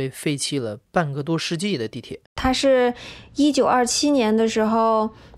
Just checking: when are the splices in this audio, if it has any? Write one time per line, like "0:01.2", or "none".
0:02.3